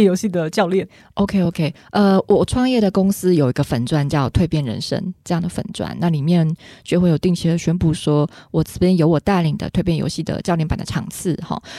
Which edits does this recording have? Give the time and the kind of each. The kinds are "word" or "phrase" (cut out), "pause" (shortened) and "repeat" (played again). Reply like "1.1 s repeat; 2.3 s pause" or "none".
none